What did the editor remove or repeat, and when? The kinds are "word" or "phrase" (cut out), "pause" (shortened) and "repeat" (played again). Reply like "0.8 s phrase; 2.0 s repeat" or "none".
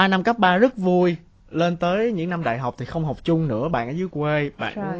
none